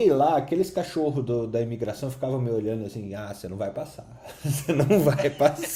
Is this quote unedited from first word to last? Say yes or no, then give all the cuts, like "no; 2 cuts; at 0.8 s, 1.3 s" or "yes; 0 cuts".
yes; 0 cuts